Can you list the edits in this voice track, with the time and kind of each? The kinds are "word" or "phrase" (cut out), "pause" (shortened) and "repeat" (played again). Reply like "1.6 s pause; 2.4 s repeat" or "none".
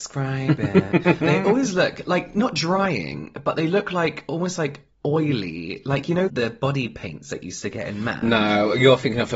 1.2 s word; 6.3 s phrase